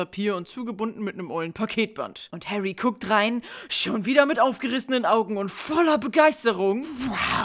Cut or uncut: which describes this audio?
uncut